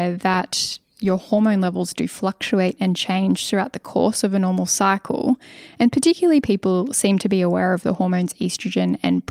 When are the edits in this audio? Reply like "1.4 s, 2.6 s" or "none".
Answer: none